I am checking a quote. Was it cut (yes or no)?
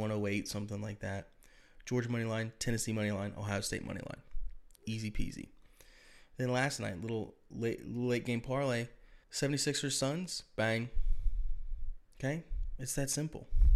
yes